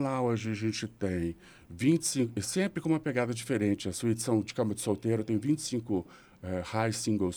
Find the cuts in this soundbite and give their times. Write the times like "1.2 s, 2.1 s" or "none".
none